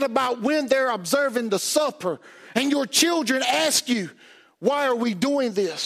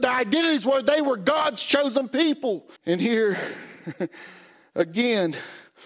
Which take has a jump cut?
second; 1 cut; at 2.8 s

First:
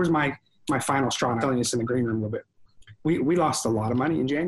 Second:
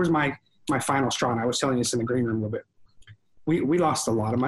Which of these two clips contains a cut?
first; 2 cuts; at 1.4 s, 3.0 s

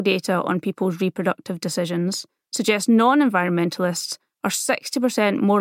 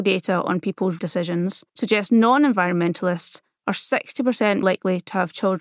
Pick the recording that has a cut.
second; 3 cuts; at 1.0 s, 1.7 s, 4.6 s

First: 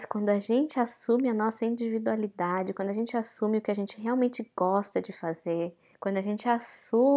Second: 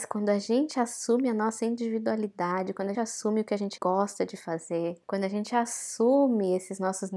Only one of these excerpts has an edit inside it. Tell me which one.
second; 3 cuts; at 2.9 s, 3.8 s, 5.0 s

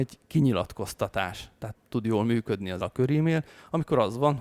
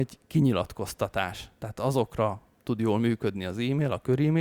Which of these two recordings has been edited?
first; 2 cuts; at 1.7 s, 2.8 s

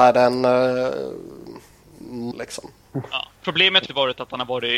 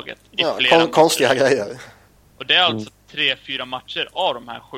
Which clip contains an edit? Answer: first; 3 cuts; at 2.3 s, 3.4 s, 3.9 s

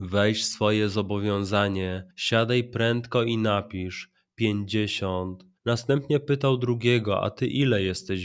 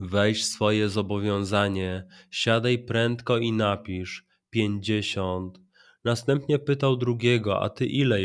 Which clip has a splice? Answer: first; 2 cuts; at 2.1 s, 5.6 s

